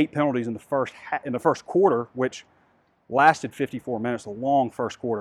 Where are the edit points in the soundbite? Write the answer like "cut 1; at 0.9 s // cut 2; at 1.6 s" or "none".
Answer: none